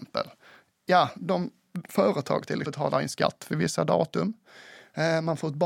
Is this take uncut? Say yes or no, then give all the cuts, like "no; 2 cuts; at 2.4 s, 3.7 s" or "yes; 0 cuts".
no; 1 cut; at 2.6 s